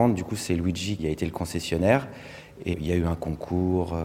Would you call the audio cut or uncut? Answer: cut